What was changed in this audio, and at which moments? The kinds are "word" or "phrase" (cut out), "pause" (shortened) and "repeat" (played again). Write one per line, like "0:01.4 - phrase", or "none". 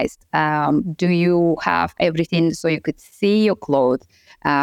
none